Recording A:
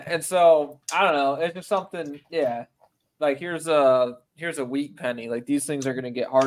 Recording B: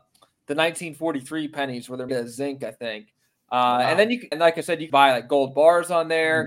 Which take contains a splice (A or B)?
B